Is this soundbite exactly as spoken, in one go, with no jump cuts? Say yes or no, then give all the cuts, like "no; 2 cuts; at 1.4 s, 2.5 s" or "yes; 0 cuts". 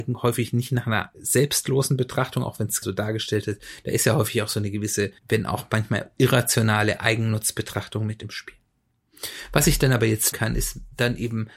no; 4 cuts; at 1.1 s, 2.8 s, 5.2 s, 10.3 s